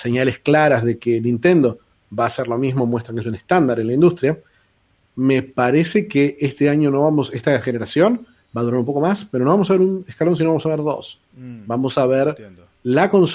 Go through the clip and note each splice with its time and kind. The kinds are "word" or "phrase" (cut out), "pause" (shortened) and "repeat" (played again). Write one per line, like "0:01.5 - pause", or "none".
none